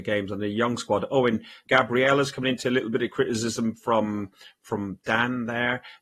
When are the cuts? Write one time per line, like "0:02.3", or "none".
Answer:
0:01.7